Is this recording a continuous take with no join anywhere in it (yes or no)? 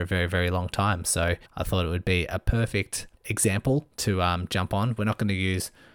no